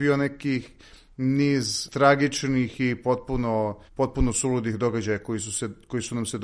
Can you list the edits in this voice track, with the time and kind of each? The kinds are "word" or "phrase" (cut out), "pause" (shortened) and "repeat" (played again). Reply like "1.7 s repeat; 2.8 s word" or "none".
3.9 s pause